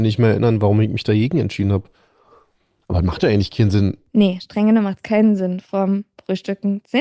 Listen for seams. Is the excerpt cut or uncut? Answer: uncut